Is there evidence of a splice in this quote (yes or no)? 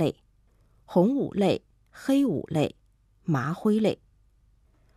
no